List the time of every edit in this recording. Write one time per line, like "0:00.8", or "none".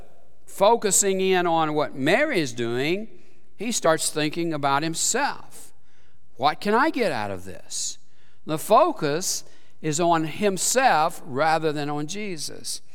none